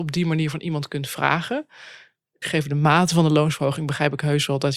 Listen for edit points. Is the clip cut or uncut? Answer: cut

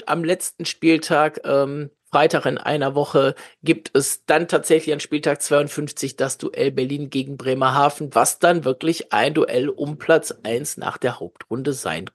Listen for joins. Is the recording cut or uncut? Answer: cut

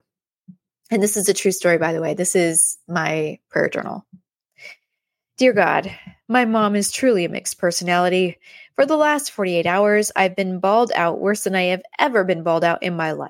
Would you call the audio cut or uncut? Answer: uncut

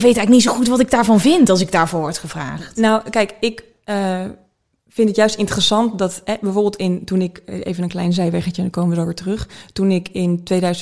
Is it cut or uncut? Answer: uncut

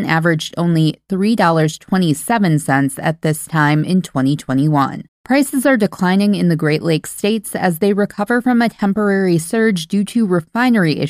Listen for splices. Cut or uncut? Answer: cut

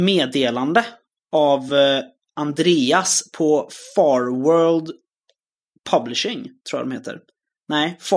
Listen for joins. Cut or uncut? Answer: uncut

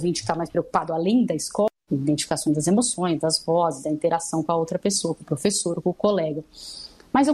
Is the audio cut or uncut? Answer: uncut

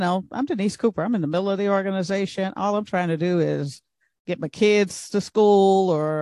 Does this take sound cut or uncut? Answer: uncut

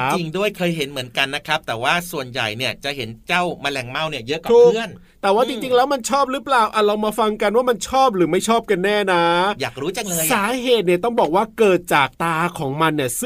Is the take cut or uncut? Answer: cut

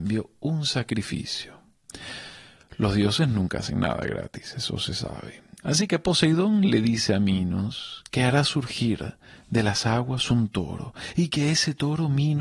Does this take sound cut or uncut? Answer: uncut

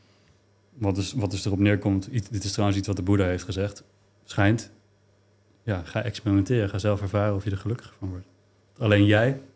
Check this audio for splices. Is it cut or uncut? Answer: uncut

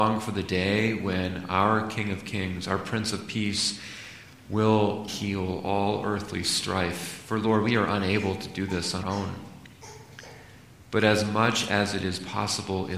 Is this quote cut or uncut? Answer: cut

